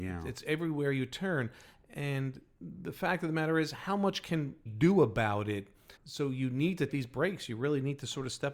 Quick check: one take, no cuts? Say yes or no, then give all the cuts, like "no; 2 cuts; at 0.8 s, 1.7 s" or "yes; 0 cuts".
no; 3 cuts; at 4.7 s, 6.0 s, 6.9 s